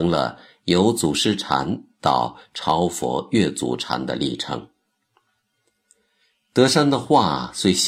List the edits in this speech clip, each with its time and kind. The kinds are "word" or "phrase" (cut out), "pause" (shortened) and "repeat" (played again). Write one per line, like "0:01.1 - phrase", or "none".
none